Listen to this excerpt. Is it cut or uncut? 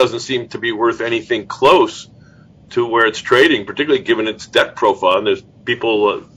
uncut